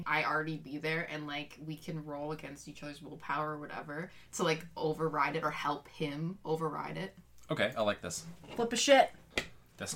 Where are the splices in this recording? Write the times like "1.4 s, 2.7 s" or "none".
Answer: none